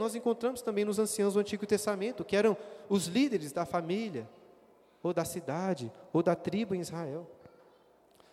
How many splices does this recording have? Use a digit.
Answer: 0